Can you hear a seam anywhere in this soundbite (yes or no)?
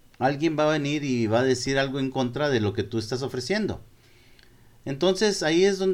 no